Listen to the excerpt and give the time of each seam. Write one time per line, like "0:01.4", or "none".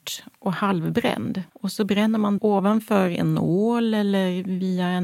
0:01.5
0:02.4